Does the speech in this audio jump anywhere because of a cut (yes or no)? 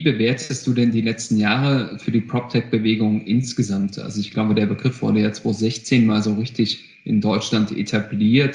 no